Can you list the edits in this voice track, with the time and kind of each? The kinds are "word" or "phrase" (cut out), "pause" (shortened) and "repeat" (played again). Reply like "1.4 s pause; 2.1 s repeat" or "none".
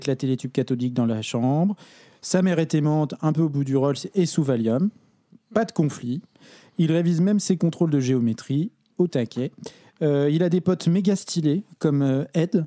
none